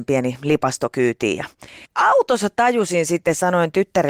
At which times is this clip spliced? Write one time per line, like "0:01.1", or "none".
0:01.9